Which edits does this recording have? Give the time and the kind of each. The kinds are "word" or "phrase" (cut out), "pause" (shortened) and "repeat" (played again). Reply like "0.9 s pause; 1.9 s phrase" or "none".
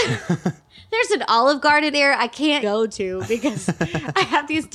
1.9 s word; 2.6 s word